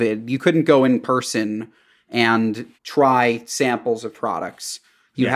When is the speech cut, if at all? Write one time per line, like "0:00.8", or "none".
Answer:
0:02.8

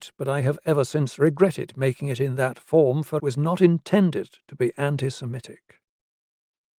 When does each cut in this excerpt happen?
0:03.2

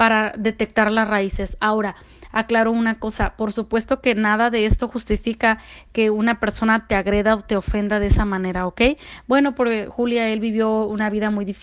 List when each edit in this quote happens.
none

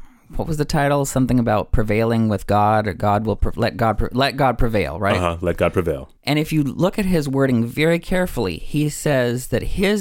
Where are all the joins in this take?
0:06.2

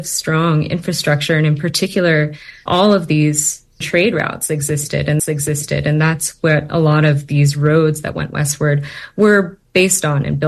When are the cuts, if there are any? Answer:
0:02.7
0:03.8
0:05.2

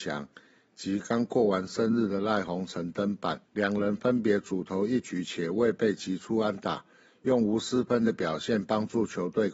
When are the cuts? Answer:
0:03.5

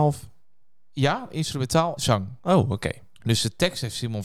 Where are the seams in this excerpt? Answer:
0:02.0

